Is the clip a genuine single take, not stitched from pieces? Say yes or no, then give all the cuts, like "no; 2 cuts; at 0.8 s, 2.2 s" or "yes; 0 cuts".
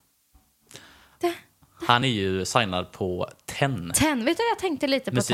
yes; 0 cuts